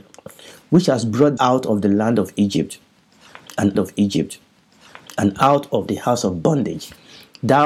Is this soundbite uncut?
no; 2 cuts; at 1.4 s, 3.7 s

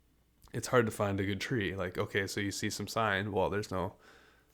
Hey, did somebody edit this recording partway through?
no; 0 cuts

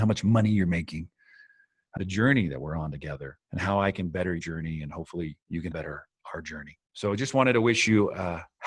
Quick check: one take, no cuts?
no; 6 cuts; at 2.0 s, 3.4 s, 4.4 s, 5.4 s, 5.7 s, 6.8 s

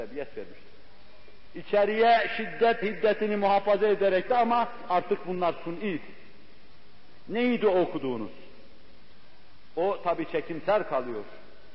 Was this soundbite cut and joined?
yes; 2 cuts; at 2.8 s, 4.3 s

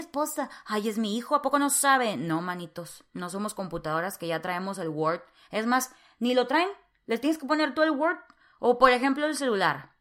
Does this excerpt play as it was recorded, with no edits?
yes; 0 cuts

